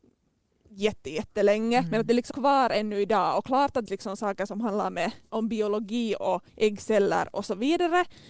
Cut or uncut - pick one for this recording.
cut